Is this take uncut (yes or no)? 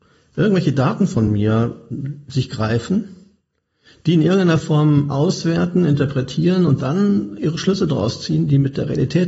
yes